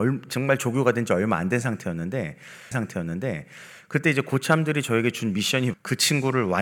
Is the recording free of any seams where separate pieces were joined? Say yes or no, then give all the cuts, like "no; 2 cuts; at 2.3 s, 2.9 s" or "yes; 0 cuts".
no; 2 cuts; at 2.7 s, 5.7 s